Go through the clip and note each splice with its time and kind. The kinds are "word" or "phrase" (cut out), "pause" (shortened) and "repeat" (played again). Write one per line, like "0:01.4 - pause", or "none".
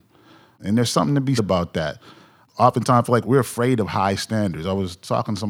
0:01.4 - word
0:03.2 - word